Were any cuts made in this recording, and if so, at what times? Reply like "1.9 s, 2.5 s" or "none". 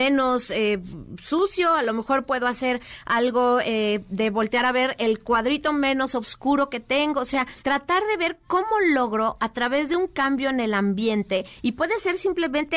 7.6 s